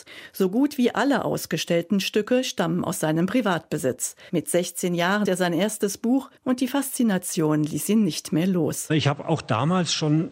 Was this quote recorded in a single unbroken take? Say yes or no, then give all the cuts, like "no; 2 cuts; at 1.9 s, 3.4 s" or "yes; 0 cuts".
no; 2 cuts; at 5.3 s, 6.4 s